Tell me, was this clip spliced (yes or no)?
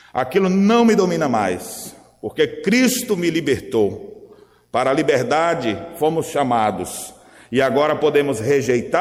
no